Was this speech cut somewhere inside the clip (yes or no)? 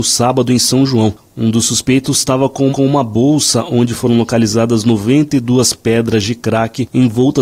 yes